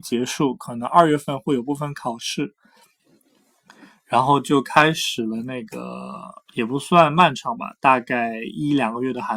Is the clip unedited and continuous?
no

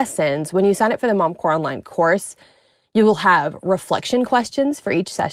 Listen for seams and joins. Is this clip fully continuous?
yes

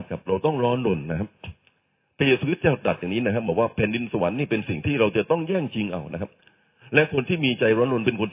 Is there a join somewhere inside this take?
no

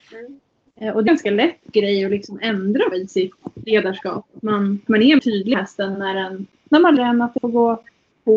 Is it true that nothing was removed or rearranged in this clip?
no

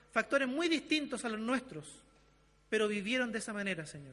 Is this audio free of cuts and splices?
yes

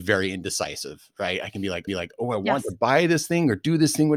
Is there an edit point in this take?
yes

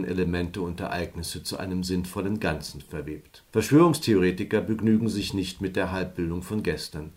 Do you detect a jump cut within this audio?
yes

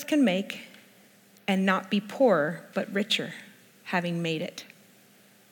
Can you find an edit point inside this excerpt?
no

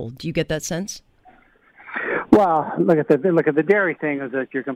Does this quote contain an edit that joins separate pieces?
no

